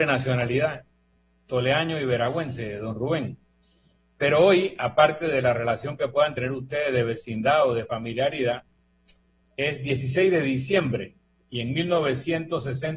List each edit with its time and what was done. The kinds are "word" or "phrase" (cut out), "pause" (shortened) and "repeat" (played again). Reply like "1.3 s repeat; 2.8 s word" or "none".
none